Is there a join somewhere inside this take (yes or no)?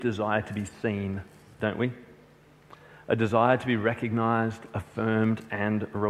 no